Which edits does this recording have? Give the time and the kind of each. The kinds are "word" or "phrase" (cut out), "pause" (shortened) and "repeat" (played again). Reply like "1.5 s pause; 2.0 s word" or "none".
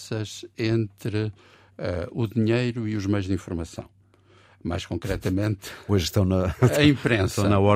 none